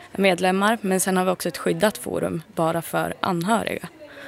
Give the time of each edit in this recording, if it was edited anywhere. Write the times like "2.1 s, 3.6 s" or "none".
2.5 s